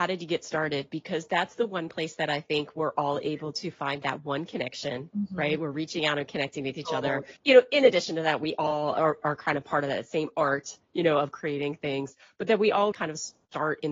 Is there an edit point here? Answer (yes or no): yes